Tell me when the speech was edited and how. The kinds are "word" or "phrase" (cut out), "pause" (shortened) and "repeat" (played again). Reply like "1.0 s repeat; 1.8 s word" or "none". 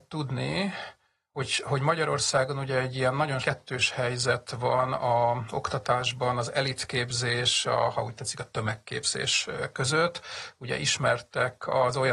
1.3 s word; 3.4 s word; 7.6 s word